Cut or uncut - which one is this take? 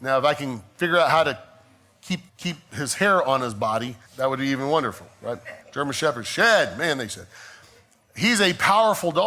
cut